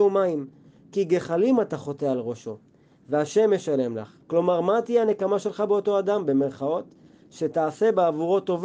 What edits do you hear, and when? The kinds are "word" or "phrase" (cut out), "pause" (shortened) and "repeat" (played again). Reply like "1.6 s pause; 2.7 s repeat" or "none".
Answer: 4.2 s pause